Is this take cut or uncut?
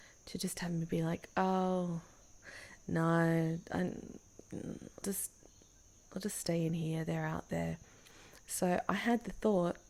cut